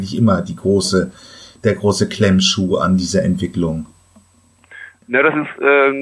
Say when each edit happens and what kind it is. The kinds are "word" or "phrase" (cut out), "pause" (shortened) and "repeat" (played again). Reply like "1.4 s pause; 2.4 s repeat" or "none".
none